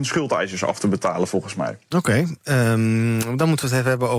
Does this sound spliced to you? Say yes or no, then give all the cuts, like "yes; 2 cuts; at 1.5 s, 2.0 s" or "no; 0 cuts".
no; 0 cuts